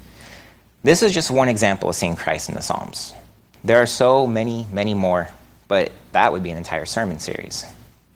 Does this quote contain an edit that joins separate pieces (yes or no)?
no